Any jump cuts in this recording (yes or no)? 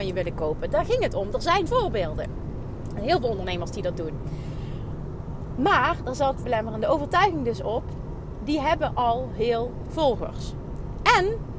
yes